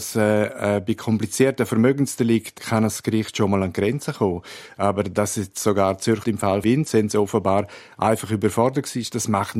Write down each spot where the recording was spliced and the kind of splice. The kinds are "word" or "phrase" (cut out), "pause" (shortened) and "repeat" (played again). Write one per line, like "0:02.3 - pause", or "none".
0:02.6 - word
0:06.2 - word
0:06.6 - word